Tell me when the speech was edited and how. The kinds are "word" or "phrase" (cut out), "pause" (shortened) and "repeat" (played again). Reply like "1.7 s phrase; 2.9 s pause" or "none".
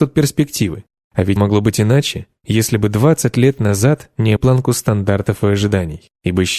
1.4 s word; 4.4 s word